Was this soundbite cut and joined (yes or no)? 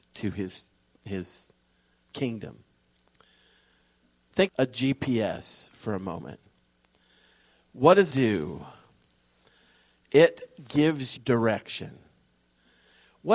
yes